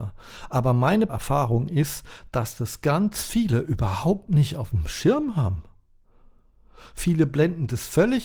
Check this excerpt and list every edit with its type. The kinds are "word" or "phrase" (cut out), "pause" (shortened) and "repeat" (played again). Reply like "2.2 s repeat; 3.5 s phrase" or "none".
1.1 s word